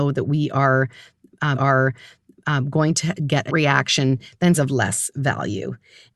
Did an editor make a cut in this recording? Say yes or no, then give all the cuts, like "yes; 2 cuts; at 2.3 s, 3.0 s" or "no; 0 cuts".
yes; 3 cuts; at 1.5 s, 3.5 s, 4.5 s